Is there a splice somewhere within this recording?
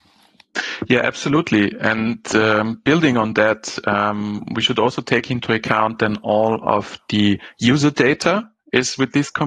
no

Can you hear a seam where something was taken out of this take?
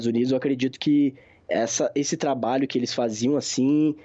no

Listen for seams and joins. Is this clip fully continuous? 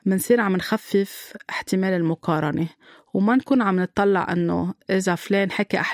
yes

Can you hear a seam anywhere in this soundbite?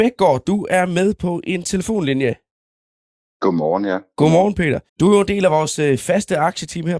yes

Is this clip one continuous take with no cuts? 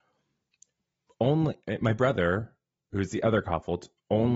yes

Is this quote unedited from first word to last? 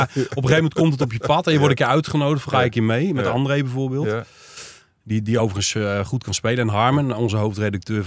yes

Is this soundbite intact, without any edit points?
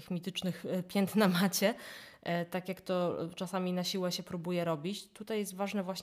yes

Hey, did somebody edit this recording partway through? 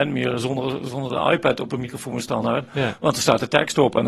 no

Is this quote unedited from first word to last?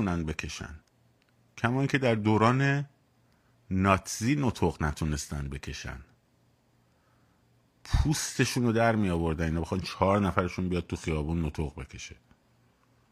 yes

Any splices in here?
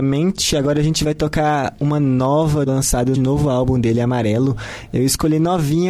yes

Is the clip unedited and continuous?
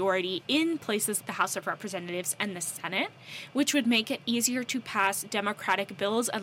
no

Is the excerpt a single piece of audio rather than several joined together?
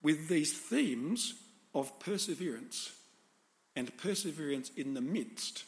yes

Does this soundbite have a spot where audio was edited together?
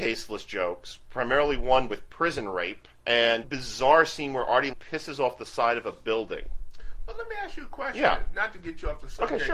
yes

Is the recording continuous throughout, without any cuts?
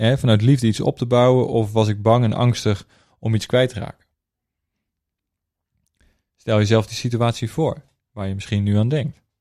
yes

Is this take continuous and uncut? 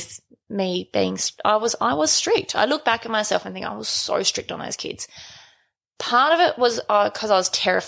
yes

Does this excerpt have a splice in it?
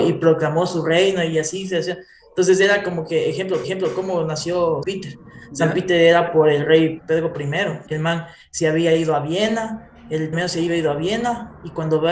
yes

